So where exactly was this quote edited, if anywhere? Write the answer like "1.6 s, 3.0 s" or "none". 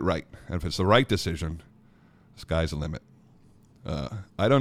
none